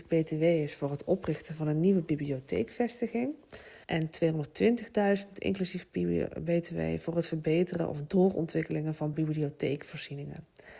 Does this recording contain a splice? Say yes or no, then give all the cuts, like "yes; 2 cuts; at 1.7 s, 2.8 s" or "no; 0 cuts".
yes; 2 cuts; at 3.8 s, 9.1 s